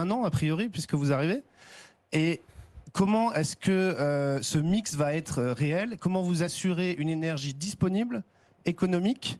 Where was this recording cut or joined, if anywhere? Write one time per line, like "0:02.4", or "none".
none